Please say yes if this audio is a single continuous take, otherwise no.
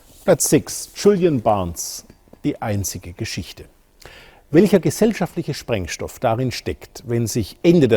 yes